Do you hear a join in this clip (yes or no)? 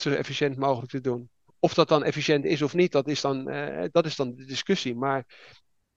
no